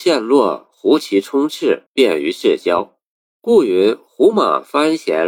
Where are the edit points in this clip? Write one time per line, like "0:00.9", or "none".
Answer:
0:01.9